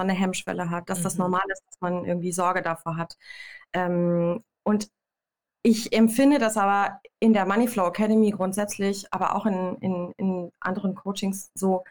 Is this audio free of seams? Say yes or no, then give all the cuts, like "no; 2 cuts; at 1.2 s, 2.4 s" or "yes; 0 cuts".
yes; 0 cuts